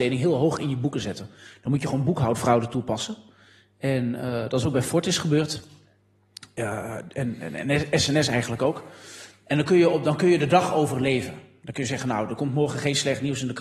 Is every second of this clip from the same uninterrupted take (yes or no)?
yes